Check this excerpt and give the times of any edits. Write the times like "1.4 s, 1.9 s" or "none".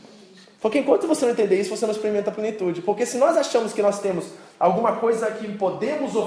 none